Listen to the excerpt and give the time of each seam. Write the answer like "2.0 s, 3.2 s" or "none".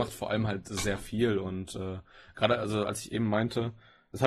none

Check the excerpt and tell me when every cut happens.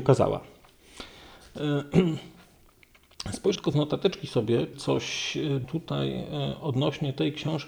3.6 s, 4.7 s, 5.6 s

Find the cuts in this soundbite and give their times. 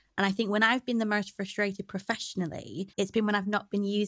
2.9 s

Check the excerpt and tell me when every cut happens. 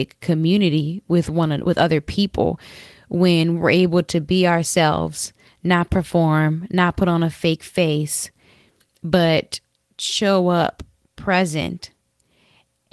1.6 s

